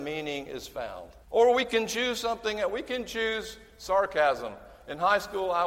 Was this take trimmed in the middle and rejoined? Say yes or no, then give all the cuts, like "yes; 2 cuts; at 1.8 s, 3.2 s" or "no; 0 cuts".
yes; 1 cut; at 1.2 s